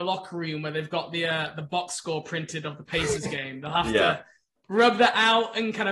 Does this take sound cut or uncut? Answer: uncut